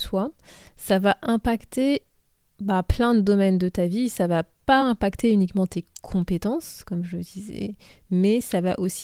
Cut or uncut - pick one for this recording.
uncut